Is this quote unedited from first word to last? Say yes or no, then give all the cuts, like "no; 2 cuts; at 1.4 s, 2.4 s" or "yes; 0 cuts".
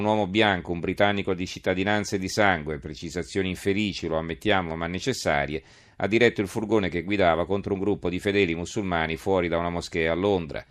yes; 0 cuts